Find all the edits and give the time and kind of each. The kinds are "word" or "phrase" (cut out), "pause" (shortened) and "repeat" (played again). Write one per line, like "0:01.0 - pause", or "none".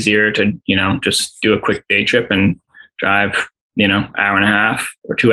none

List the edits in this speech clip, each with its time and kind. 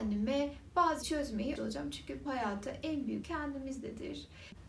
0:01.0 - word
0:01.5 - word
0:02.2 - word
0:03.2 - word

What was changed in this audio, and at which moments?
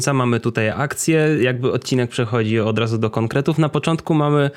none

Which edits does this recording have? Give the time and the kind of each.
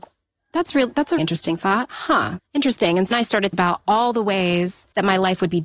0:01.2 - word
0:03.1 - word
0:03.5 - word

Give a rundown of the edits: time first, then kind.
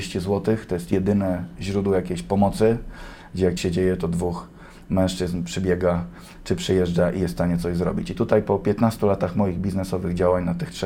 0:03.6 - word

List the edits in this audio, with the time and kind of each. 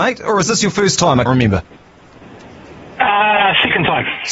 0:01.3 - word

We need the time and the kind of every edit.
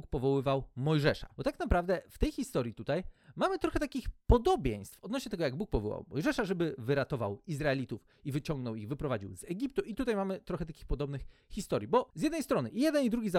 none

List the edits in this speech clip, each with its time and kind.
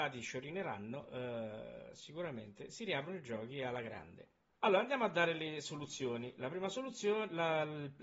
0:04.5 - pause

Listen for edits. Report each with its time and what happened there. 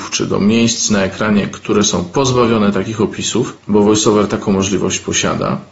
none

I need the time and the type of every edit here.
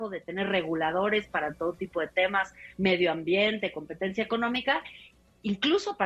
none

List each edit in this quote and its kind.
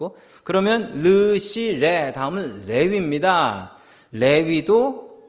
none

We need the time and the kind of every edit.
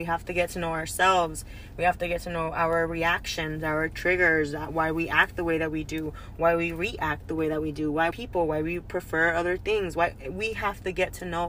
0:08.1 - phrase

